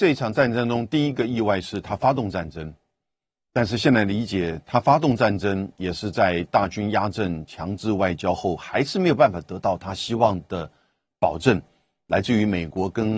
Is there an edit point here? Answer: no; 0 cuts

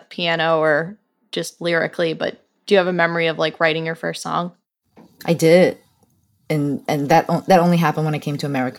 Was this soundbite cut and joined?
no; 0 cuts

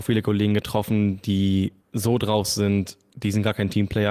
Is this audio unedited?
no; 1 cut; at 1.8 s

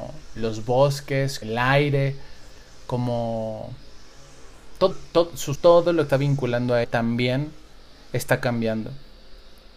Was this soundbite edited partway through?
yes; 5 cuts; at 1.4 s, 4.9 s, 5.5 s, 6.1 s, 6.8 s

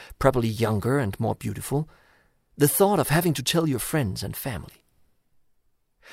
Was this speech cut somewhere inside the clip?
no; 0 cuts

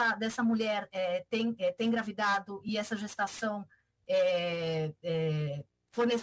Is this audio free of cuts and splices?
yes; 0 cuts

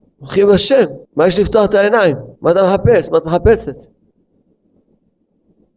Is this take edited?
yes; 2 cuts; at 1.0 s, 2.4 s

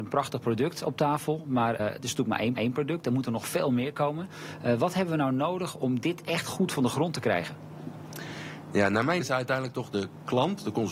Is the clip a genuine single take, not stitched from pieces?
no; 3 cuts; at 1.8 s, 2.6 s, 9.2 s

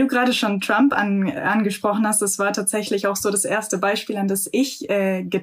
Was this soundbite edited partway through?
no; 0 cuts

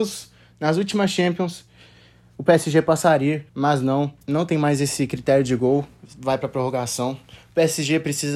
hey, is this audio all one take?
no; 3 cuts; at 3.5 s, 4.2 s, 6.0 s

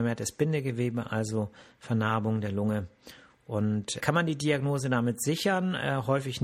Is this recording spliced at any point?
yes; 1 cut; at 4.0 s

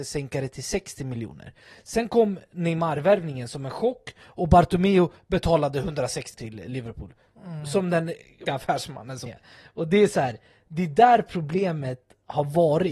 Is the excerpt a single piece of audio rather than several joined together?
no; 3 cuts; at 6.3 s, 8.5 s, 9.3 s

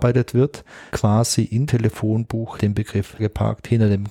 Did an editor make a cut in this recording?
yes; 4 cuts; at 0.9 s, 1.7 s, 2.6 s, 3.2 s

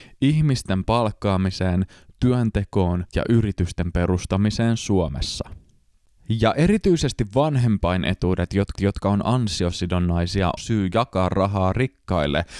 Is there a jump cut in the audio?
yes; 3 cuts; at 3.1 s, 8.8 s, 10.6 s

